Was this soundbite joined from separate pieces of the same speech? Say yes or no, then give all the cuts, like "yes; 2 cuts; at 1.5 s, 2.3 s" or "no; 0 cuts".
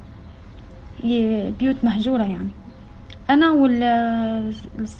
no; 0 cuts